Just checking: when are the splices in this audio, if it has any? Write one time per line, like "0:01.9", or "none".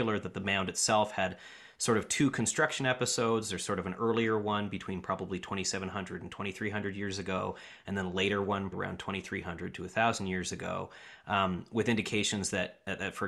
0:08.7